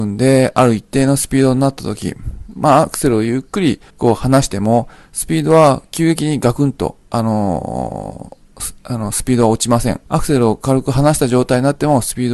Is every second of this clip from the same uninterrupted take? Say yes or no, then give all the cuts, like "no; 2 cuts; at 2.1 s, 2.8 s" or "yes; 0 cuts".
no; 2 cuts; at 3.9 s, 10.1 s